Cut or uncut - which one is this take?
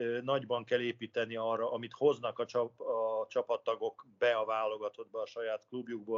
uncut